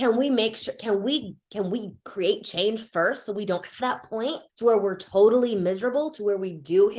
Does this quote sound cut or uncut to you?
cut